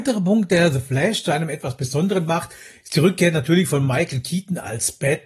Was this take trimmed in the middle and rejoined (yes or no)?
no